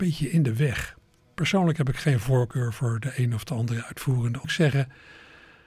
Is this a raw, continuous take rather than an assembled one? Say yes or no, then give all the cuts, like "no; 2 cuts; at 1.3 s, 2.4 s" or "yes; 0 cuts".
no; 1 cut; at 4.4 s